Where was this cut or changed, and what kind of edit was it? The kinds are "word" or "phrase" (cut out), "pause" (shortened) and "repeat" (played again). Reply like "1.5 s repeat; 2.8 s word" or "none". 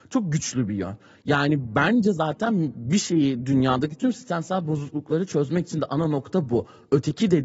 none

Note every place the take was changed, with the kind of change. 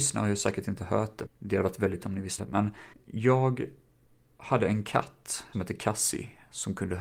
1.3 s word; 2.0 s word; 2.4 s word; 2.9 s pause; 5.5 s word

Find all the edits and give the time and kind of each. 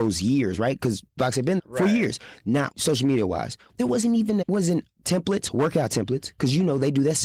1.2 s word; 1.6 s word; 2.7 s phrase; 3.7 s word; 4.4 s word

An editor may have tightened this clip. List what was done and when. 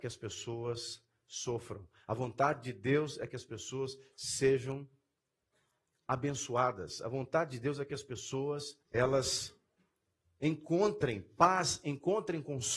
8.8 s pause

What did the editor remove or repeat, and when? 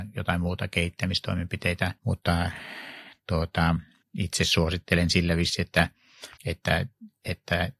2.0 s pause; 4.0 s pause; 6.4 s pause

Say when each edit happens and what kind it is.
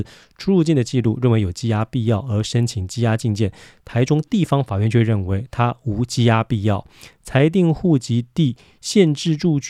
none

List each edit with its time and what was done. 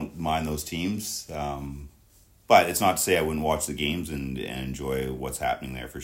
none

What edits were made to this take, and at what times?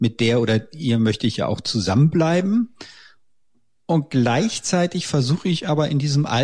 none

